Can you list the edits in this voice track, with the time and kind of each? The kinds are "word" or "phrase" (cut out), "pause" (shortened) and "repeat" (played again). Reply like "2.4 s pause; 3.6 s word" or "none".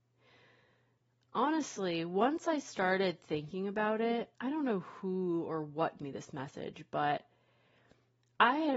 4.3 s pause; 6.0 s word